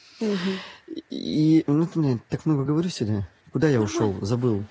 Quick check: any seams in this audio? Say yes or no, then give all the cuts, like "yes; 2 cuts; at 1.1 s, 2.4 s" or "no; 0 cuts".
no; 0 cuts